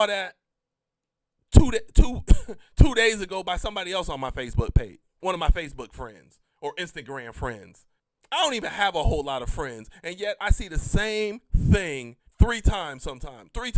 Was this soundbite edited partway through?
yes; 1 cut; at 12.3 s

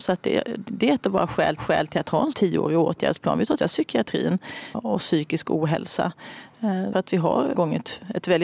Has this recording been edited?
yes; 6 cuts; at 1.6 s, 2.3 s, 3.6 s, 4.7 s, 6.9 s, 7.5 s

